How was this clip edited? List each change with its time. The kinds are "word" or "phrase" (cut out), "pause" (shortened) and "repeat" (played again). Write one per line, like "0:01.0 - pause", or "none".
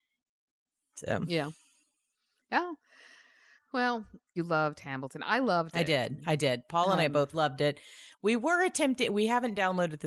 0:04.4 - phrase
0:07.3 - word